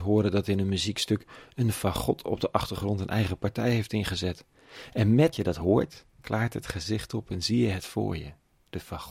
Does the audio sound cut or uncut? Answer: cut